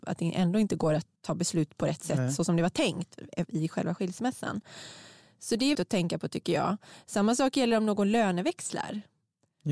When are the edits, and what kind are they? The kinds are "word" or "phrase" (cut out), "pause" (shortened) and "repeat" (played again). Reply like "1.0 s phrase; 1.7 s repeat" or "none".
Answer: 1.2 s pause; 5.7 s word

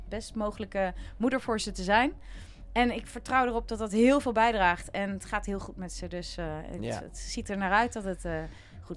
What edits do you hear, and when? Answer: none

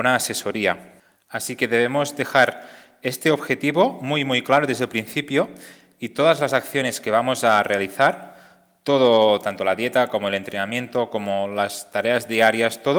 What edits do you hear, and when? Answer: none

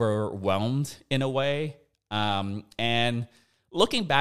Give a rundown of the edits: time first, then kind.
none

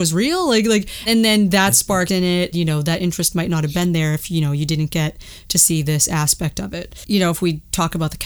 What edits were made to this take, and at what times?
1.1 s word; 2.1 s word; 2.5 s word

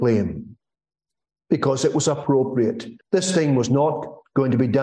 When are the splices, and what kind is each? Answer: 3.0 s pause

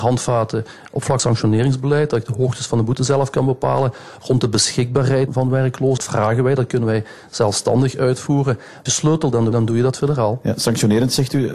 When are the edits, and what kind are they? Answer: 1.2 s word; 5.3 s word; 6.0 s word; 8.9 s word; 9.5 s word

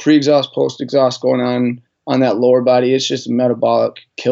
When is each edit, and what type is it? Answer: none

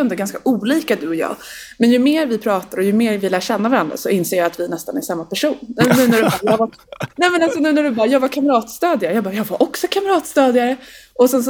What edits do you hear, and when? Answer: none

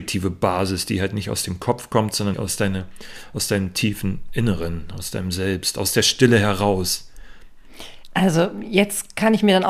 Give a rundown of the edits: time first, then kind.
2.3 s word

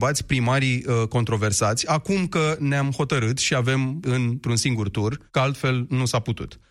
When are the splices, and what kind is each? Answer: 4.0 s word; 5.3 s pause

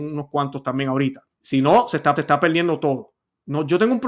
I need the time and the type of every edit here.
1.3 s pause; 2.2 s repeat

